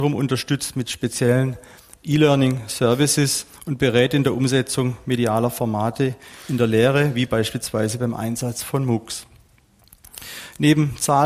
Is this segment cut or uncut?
uncut